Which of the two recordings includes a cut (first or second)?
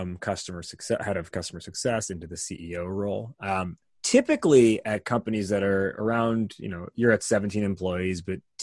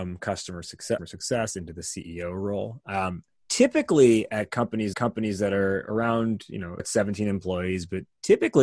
second